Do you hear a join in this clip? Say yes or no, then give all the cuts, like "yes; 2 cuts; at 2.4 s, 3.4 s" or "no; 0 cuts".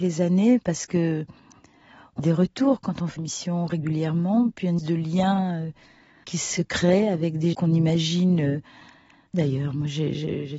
yes; 6 cuts; at 2.2 s, 3.2 s, 4.8 s, 6.2 s, 7.5 s, 9.3 s